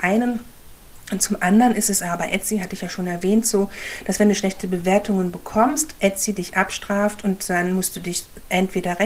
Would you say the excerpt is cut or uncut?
uncut